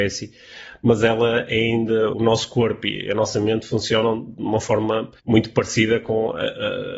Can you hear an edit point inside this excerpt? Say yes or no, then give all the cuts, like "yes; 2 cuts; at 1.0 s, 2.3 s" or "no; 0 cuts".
yes; 2 cuts; at 2.1 s, 5.2 s